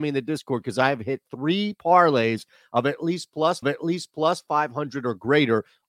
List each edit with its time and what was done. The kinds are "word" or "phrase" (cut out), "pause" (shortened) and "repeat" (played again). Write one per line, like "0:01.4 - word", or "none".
0:03.6 - repeat